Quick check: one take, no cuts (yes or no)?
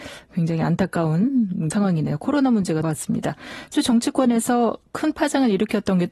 no